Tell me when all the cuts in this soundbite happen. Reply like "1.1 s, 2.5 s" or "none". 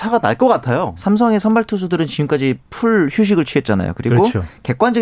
none